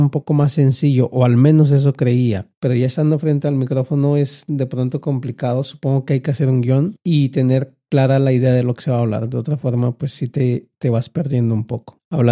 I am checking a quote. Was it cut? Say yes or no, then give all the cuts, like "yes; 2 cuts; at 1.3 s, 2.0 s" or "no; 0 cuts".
no; 0 cuts